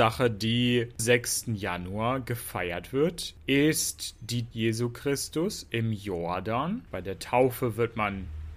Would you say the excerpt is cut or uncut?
cut